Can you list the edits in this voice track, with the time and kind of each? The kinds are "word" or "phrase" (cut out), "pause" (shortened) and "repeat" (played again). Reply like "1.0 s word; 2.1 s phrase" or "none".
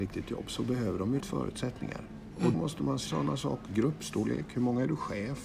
1.2 s word; 2.5 s word; 3.1 s word; 3.7 s word